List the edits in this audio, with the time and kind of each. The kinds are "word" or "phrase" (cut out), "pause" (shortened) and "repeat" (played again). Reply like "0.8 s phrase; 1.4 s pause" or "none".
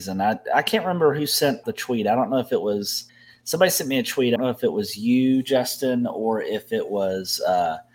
1.6 s word; 3.1 s pause; 4.4 s word